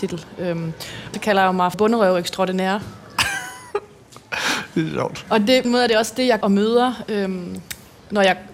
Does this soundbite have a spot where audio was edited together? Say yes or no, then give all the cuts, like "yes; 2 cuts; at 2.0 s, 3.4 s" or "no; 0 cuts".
yes; 4 cuts; at 1.1 s, 1.7 s, 5.6 s, 6.4 s